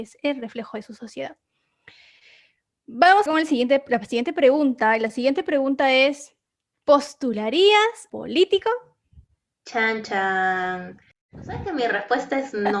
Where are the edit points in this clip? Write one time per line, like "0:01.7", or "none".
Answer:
0:03.3
0:08.1